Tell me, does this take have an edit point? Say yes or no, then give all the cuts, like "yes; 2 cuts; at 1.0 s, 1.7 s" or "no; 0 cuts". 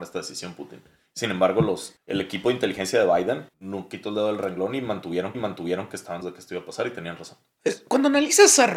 yes; 3 cuts; at 3.5 s, 5.3 s, 6.2 s